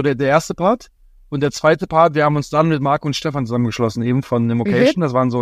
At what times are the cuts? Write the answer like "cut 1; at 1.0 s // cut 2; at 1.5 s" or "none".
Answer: none